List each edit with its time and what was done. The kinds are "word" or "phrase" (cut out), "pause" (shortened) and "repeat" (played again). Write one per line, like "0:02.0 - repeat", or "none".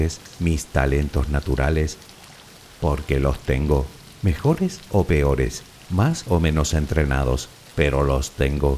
none

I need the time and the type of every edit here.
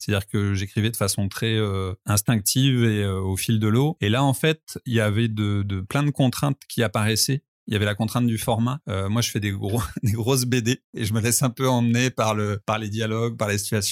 none

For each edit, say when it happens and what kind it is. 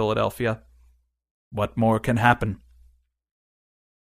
none

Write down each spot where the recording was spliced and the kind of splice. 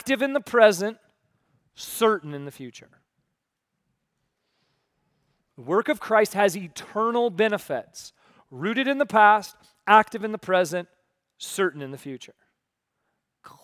none

